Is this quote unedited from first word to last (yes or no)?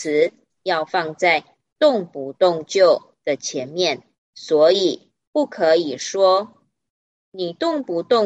no